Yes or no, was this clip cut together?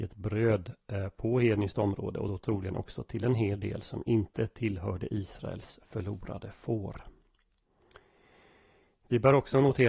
no